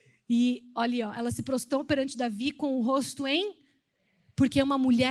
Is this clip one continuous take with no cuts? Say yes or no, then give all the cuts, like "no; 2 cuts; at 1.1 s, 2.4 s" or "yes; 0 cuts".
yes; 0 cuts